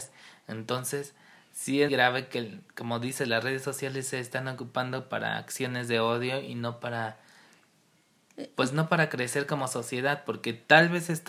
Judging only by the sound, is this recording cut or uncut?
cut